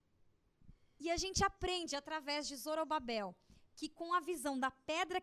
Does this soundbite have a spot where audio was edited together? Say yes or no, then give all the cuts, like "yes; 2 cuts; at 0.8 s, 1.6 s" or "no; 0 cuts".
no; 0 cuts